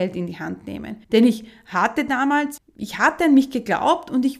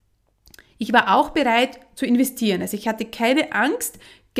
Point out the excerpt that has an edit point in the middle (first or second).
first